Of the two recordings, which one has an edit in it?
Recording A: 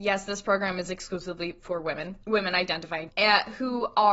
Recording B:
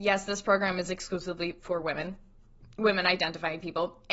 A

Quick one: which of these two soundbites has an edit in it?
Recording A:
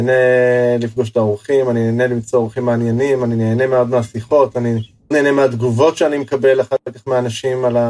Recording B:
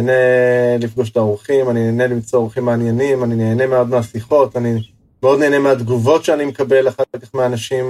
A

